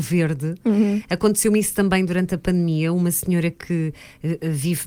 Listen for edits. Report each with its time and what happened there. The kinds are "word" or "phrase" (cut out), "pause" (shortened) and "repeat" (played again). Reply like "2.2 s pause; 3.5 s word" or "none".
none